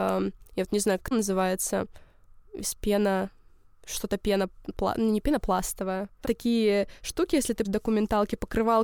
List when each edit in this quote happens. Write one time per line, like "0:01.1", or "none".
0:01.1
0:02.7
0:06.2
0:07.6